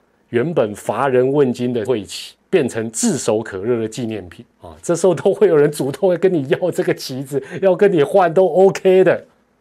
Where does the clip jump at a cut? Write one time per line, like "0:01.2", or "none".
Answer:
0:01.9
0:02.4
0:04.5